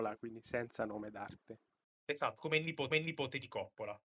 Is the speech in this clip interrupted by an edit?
yes; 2 cuts; at 1.8 s, 2.9 s

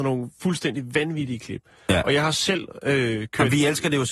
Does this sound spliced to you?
no; 0 cuts

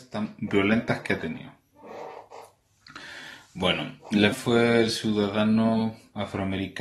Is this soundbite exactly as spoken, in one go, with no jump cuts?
no; 1 cut; at 4.3 s

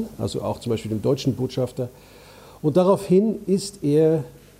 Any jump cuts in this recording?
no; 0 cuts

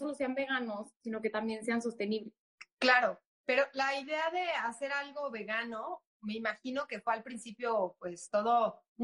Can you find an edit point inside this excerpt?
no; 0 cuts

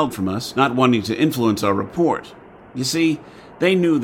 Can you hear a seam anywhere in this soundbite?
no; 0 cuts

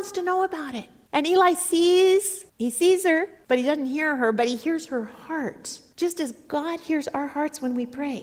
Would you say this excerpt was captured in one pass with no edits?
yes; 0 cuts

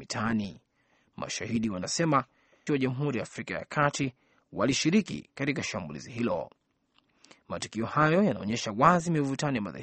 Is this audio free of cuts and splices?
no; 1 cut; at 2.7 s

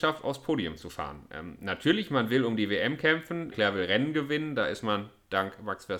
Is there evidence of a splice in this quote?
yes; 1 cut; at 3.5 s

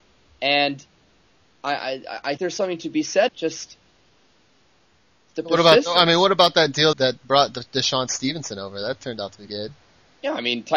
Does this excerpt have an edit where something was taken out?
yes; 4 cuts; at 2.4 s, 3.3 s, 6.9 s, 9.5 s

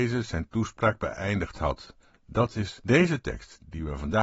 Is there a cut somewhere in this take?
no; 0 cuts

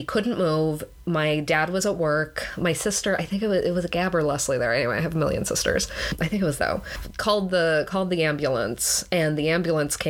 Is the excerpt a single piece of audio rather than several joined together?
no; 1 cut; at 6.6 s

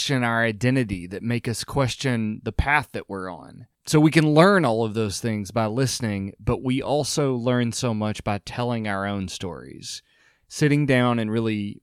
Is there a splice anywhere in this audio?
yes; 1 cut; at 3.7 s

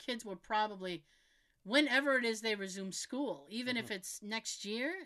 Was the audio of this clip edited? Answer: no; 0 cuts

